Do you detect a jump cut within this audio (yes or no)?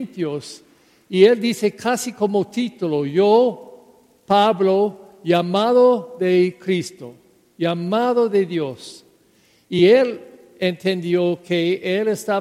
no